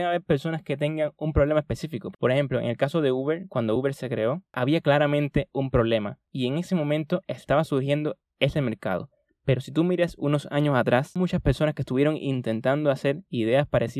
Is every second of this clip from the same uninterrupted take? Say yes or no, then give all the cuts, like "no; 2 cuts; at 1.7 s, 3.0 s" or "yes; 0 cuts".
yes; 0 cuts